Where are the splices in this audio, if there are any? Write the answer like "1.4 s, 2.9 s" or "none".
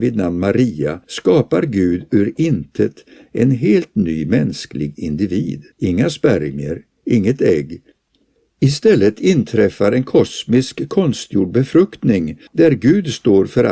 1.0 s, 5.7 s, 12.5 s